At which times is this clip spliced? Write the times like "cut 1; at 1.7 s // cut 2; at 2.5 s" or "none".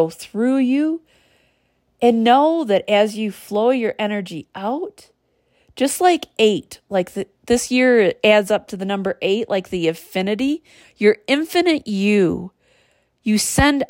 none